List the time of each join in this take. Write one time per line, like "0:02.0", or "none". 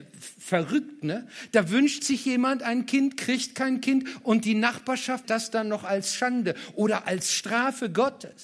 0:05.2

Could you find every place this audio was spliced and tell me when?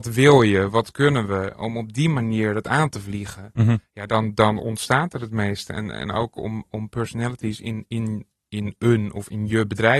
none

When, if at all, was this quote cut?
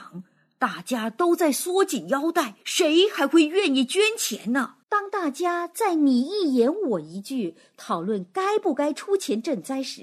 0:02.6
0:04.8

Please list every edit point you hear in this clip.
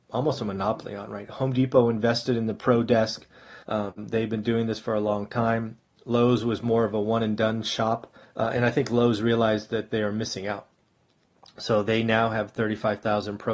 0:03.6
0:08.2

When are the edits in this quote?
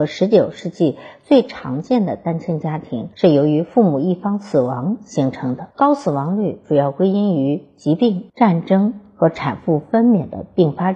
0:03.1
0:05.7
0:08.3

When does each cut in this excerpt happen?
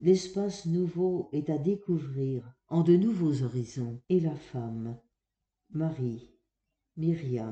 0:02.6
0:04.0

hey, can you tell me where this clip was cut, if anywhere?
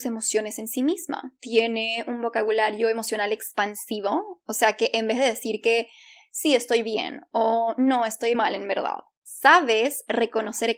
0:08.3

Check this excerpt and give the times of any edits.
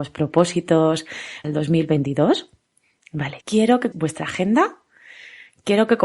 0:01.4
0:03.4
0:03.9

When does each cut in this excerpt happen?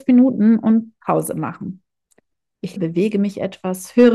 0:02.8

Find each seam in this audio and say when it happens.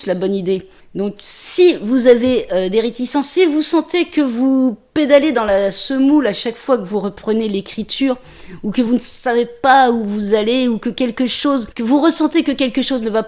none

